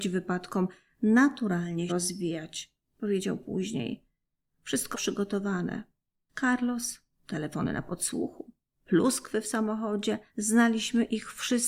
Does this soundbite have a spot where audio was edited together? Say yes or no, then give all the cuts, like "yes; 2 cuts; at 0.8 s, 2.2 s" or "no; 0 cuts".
yes; 3 cuts; at 1.9 s, 4.9 s, 10.3 s